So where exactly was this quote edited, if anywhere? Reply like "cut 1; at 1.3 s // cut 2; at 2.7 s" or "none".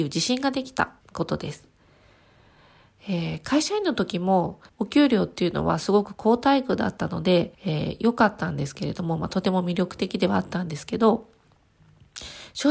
cut 1; at 1.0 s // cut 2; at 4.7 s // cut 3; at 7.5 s